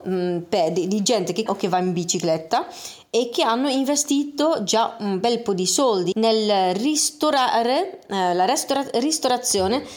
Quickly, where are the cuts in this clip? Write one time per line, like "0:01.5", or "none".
0:01.5
0:06.1